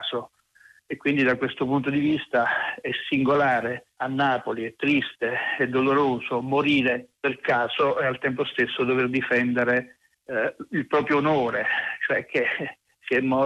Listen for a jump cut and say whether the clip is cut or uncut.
cut